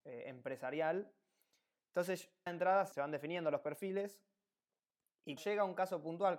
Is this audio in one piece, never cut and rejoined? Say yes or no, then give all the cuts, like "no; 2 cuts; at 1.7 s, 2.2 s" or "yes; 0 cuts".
no; 3 cuts; at 2.5 s, 2.9 s, 5.4 s